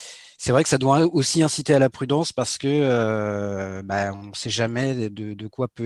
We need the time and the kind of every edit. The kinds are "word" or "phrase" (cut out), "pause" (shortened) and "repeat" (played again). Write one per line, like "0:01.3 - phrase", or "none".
none